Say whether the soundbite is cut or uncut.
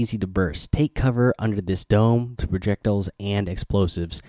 cut